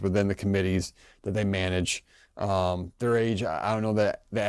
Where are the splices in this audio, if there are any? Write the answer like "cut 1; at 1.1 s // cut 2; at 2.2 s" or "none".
none